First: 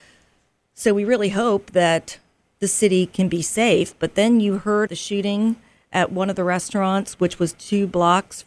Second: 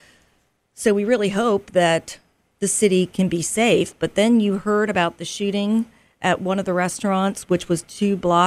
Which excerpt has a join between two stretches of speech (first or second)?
first